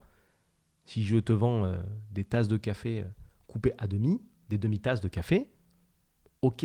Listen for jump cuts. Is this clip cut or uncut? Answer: uncut